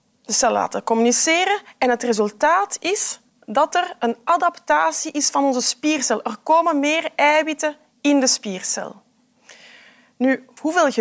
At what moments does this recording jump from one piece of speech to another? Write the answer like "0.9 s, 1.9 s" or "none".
none